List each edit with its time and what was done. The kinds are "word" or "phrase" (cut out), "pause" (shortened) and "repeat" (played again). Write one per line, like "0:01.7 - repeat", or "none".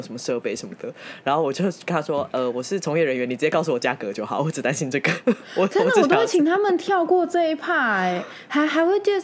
none